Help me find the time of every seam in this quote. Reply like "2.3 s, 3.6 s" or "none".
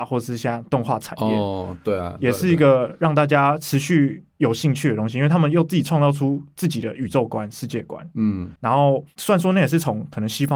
4.3 s, 8.6 s